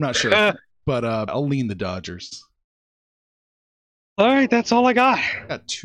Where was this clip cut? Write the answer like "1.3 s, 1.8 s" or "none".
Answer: 1.3 s